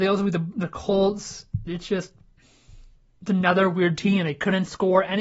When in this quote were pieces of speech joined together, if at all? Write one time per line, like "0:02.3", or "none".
0:01.7
0:03.0